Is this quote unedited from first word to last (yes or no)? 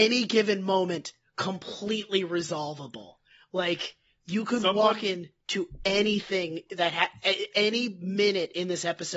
yes